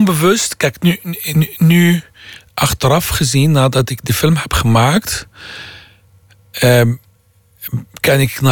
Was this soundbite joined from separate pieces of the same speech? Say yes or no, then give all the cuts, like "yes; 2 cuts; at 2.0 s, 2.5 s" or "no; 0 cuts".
no; 0 cuts